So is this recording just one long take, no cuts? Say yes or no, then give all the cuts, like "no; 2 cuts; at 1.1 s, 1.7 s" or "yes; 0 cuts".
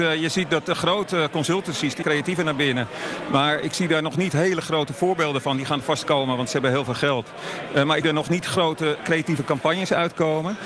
no; 2 cuts; at 2.0 s, 8.0 s